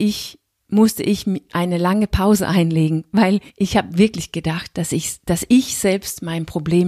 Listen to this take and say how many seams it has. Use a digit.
1